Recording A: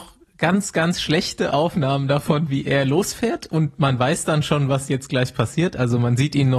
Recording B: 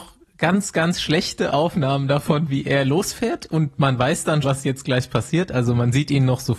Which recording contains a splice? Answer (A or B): B